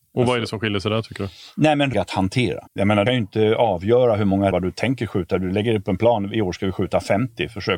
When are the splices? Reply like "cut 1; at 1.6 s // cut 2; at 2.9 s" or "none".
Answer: cut 1; at 1.9 s // cut 2; at 2.7 s // cut 3; at 3.1 s // cut 4; at 4.5 s